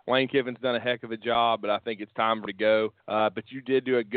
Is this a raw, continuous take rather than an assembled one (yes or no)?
no